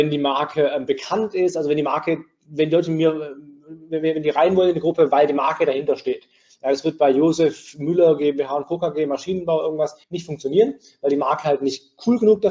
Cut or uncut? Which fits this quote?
cut